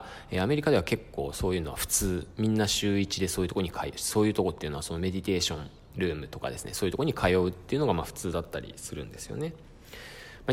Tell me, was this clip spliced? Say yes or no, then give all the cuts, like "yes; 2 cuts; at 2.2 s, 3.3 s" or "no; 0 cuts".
no; 0 cuts